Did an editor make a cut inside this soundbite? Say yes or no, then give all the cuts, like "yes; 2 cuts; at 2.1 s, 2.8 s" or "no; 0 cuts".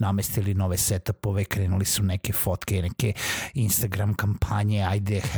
no; 0 cuts